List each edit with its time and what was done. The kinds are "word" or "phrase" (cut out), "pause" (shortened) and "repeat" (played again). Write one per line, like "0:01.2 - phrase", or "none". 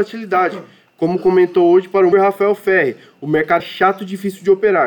0:02.1 - word
0:03.6 - word